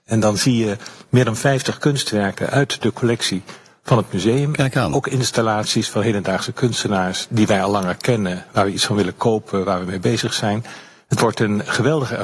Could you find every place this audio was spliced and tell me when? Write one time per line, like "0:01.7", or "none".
none